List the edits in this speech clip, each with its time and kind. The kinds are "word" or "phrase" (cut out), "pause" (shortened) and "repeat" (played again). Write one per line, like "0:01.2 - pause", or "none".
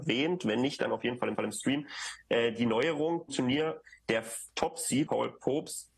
0:01.4 - repeat
0:03.3 - word
0:04.0 - pause
0:05.1 - word

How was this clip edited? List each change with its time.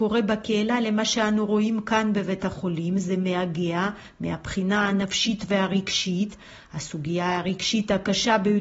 none

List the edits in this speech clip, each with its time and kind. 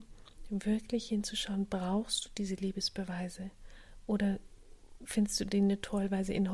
none

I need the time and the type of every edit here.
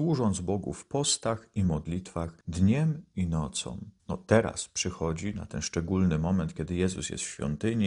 0:02.4 - pause
0:04.0 - pause

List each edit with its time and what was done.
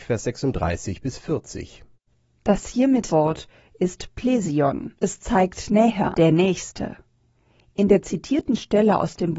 0:02.1 - pause
0:03.1 - phrase
0:05.0 - pause
0:06.1 - word

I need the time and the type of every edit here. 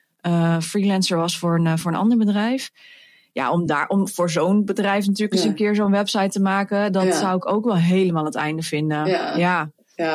none

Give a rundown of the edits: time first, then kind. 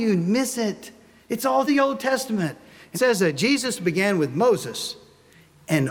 0:01.7 - word
0:02.9 - word

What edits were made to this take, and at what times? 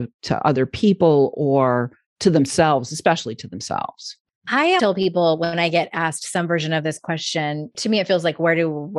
0:04.8 - word

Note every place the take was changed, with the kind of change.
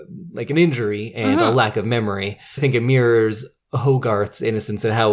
0:02.6 - phrase

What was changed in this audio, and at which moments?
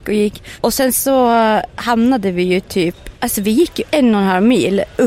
none

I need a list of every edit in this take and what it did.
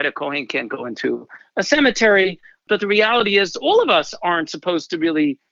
none

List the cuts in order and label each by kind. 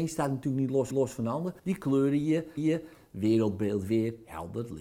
0:00.9 - repeat
0:01.6 - pause
0:02.6 - repeat

